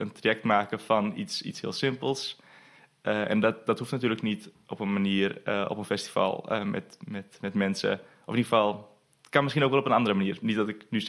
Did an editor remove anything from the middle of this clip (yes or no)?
no